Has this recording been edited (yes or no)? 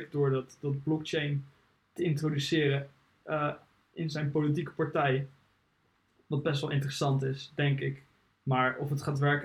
no